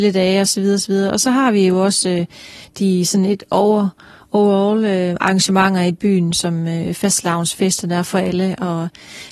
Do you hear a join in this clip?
no; 0 cuts

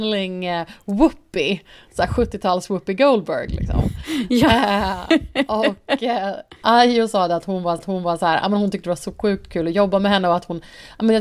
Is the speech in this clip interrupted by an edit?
yes; 1 cut; at 7.8 s

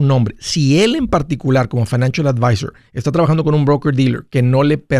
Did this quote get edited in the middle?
no; 0 cuts

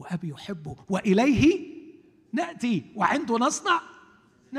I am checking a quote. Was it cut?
no; 0 cuts

